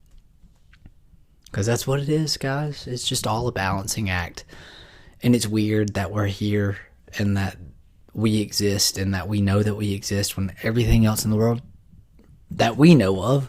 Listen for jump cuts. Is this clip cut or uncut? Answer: uncut